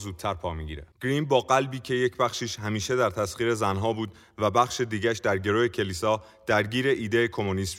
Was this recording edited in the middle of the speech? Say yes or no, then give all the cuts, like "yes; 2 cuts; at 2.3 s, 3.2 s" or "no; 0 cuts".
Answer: yes; 1 cut; at 0.9 s